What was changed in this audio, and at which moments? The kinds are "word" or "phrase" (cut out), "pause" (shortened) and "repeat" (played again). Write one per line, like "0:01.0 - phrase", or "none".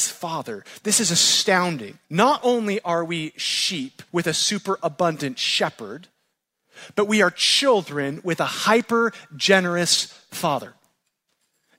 0:02.0 - pause
0:04.1 - pause